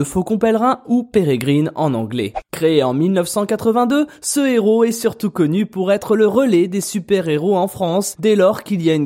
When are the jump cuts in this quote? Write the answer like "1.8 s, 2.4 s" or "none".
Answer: none